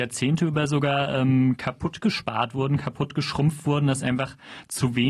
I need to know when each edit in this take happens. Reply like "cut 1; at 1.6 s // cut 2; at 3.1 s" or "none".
none